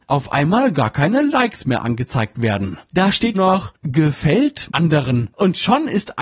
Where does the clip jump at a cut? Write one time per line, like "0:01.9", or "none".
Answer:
0:03.3
0:04.7